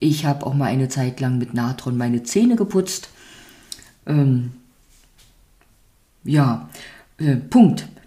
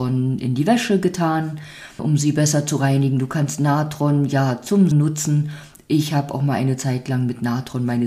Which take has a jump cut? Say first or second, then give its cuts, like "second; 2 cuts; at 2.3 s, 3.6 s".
second; 2 cuts; at 2.0 s, 4.9 s